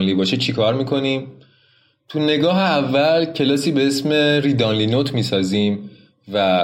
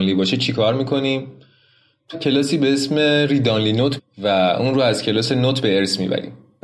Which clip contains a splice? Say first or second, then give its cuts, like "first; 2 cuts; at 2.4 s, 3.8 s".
second; 2 cuts; at 2.1 s, 4.0 s